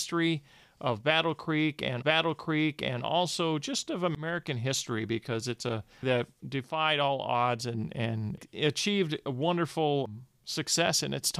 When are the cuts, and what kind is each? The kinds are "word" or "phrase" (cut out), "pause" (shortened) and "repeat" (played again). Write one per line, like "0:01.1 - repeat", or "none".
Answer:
0:02.0 - repeat
0:06.0 - phrase

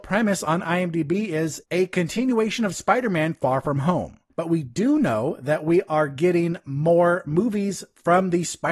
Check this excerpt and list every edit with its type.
0:01.6 - pause
0:04.3 - pause

